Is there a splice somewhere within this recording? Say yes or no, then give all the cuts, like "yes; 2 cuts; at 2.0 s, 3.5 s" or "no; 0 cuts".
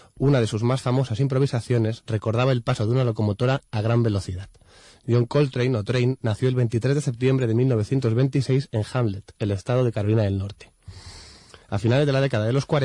no; 0 cuts